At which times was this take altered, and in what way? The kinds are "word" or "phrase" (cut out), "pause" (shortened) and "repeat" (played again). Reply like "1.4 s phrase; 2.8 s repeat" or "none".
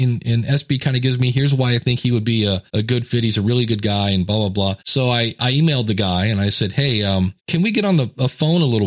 2.7 s pause; 4.8 s pause; 7.4 s pause